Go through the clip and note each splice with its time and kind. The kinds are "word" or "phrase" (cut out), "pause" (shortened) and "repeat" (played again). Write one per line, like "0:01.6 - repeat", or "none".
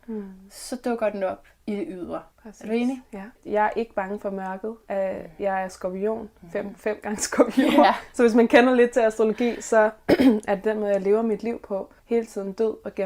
0:02.3 - pause
0:03.4 - pause
0:04.8 - pause
0:12.0 - pause